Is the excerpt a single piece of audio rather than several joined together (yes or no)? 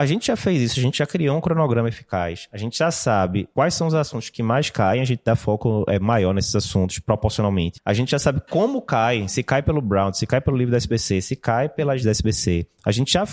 no